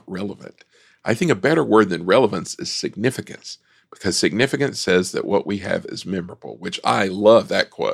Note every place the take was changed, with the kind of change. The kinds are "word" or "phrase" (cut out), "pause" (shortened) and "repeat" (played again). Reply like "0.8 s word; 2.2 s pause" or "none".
none